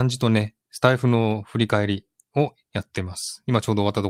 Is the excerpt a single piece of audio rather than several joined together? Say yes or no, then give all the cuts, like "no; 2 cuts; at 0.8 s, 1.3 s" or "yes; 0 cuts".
yes; 0 cuts